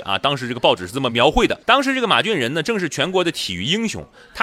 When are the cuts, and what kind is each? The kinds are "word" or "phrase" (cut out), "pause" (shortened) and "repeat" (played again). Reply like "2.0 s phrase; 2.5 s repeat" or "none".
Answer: 1.6 s pause

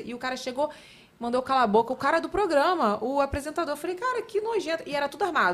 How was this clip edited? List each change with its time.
none

